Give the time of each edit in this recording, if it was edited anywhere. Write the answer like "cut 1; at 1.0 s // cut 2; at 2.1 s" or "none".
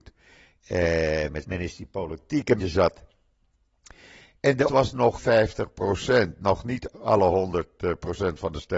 cut 1; at 1.4 s // cut 2; at 2.6 s // cut 3; at 4.7 s // cut 4; at 5.2 s // cut 5; at 6.9 s

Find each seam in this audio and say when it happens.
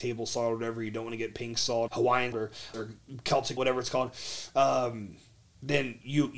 cut 1; at 1.9 s // cut 2; at 2.3 s // cut 3; at 2.7 s // cut 4; at 3.6 s

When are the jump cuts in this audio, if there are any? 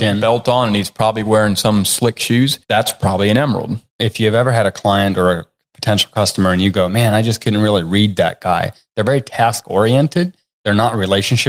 cut 1; at 2.6 s // cut 2; at 3.9 s

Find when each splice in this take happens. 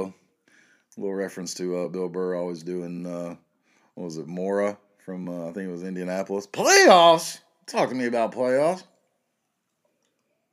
none

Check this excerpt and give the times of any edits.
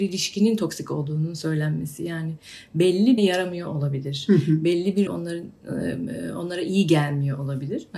cut 1; at 3.2 s // cut 2; at 5.1 s

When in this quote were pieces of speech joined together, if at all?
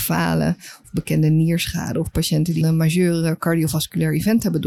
cut 1; at 2.6 s

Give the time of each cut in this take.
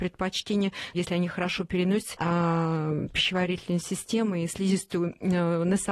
cut 1; at 0.9 s // cut 2; at 2.1 s

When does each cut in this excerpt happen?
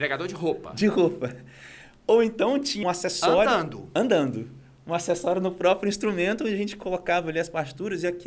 cut 1; at 2.8 s

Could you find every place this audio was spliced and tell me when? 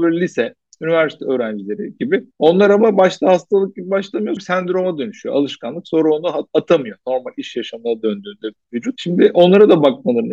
cut 1; at 2.3 s // cut 2; at 4.4 s

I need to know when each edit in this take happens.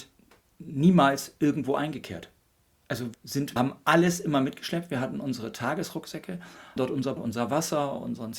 cut 1; at 3.1 s // cut 2; at 3.6 s // cut 3; at 6.8 s // cut 4; at 7.2 s

